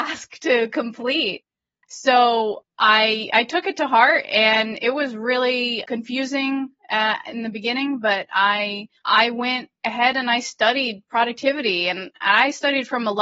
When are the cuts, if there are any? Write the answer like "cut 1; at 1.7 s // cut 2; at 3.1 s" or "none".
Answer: cut 1; at 5.8 s // cut 2; at 9.0 s